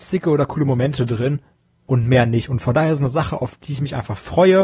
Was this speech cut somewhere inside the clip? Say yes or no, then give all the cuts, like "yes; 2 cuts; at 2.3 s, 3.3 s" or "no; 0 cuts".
no; 0 cuts